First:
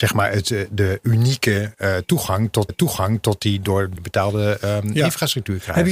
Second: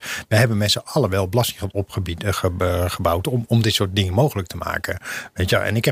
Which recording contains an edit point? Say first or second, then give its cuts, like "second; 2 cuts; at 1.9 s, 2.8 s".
first; 2 cuts; at 2.7 s, 4.0 s